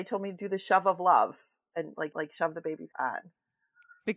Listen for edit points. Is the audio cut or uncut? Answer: cut